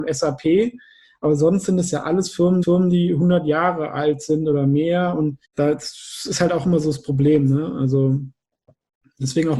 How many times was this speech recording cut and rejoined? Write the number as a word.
two